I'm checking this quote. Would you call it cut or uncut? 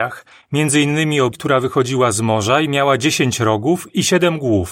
cut